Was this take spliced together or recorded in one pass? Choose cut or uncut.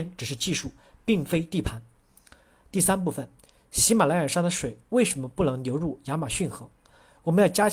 uncut